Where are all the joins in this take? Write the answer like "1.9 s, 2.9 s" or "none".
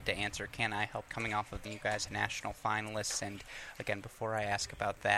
1.1 s, 1.6 s, 2.1 s